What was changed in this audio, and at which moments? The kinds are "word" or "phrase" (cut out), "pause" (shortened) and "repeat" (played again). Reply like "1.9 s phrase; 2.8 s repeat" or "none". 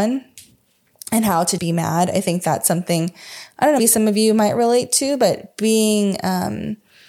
1.6 s word; 3.8 s word